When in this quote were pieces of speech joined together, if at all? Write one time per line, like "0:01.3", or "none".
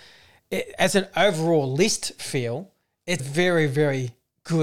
0:03.2